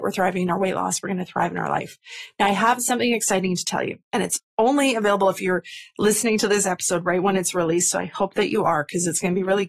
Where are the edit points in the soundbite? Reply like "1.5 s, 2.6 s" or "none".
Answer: 4.0 s

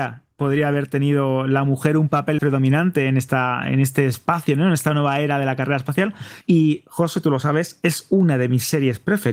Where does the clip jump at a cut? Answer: 2.4 s, 6.4 s

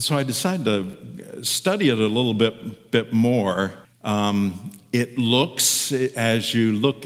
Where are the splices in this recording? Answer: 3.8 s

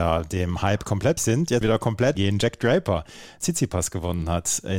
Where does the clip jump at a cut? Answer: 1.2 s, 1.6 s, 2.2 s, 3.4 s

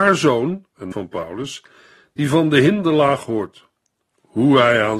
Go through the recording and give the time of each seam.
0.9 s

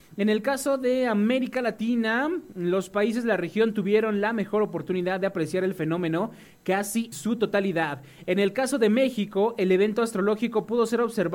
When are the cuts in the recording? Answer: 7.1 s

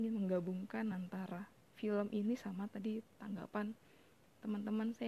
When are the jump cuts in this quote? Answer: none

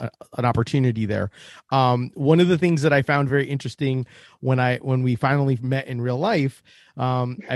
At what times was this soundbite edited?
none

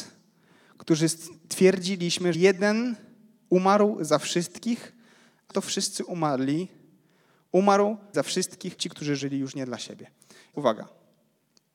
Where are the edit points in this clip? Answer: 2.3 s, 5.5 s, 8.1 s, 8.8 s, 9.2 s, 10.5 s

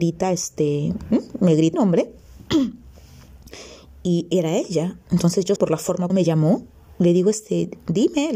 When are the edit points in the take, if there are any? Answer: 1.7 s, 5.6 s, 6.1 s

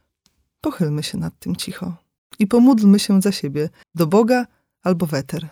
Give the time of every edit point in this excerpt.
2.2 s, 3.8 s

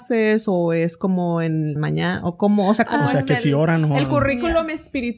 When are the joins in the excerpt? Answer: 1.8 s

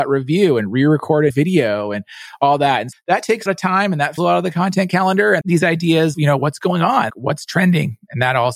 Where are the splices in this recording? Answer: 1.3 s, 2.9 s, 3.5 s, 4.2 s, 5.4 s, 6.1 s, 7.1 s

